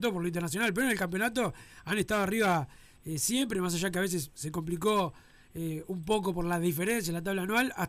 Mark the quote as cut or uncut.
uncut